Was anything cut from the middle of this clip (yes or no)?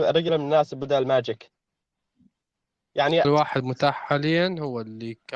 yes